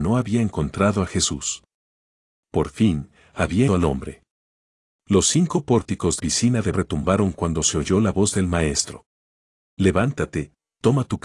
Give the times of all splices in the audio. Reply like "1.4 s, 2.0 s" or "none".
3.7 s, 6.2 s, 6.7 s